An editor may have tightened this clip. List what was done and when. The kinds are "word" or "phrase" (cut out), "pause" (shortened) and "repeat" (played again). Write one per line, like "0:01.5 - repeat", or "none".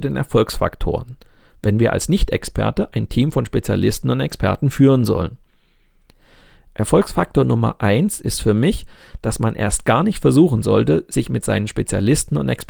none